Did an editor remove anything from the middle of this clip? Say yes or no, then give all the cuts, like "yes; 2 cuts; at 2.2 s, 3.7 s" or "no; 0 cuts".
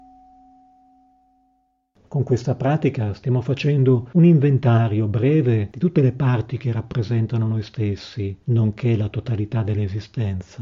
no; 0 cuts